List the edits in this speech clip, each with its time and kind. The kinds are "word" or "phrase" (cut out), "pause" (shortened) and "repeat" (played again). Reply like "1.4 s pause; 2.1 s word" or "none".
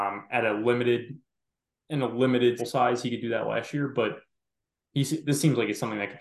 2.6 s word